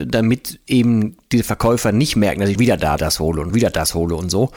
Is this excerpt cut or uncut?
cut